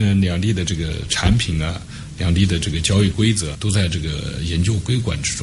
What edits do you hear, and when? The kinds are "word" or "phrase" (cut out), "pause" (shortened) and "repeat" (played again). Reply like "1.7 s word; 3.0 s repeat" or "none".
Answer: 3.5 s word